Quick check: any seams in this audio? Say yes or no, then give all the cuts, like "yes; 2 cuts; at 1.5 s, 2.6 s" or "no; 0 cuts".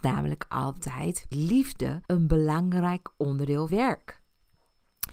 yes; 3 cuts; at 1.3 s, 2.1 s, 3.7 s